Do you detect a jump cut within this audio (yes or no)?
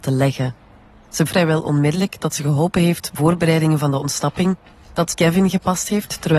yes